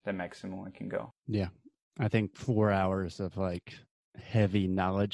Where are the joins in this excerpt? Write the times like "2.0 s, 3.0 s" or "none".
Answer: 1.2 s